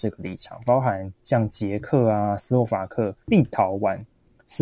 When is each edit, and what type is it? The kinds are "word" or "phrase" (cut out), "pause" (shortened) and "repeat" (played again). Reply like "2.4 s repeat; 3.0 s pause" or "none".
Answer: 3.2 s pause